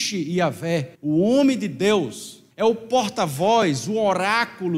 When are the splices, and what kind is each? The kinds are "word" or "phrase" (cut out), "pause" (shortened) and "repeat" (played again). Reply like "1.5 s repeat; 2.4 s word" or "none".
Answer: 0.9 s pause; 2.5 s pause